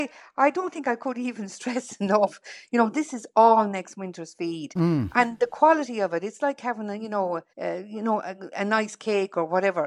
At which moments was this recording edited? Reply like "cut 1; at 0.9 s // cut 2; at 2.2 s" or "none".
cut 1; at 7.5 s